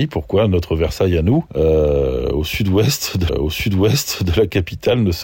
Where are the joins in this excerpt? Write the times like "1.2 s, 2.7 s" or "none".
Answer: 3.3 s